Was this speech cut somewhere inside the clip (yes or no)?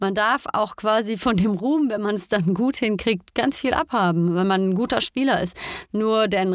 no